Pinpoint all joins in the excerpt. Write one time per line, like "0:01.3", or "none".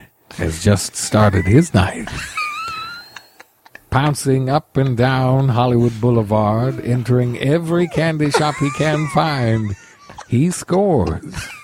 none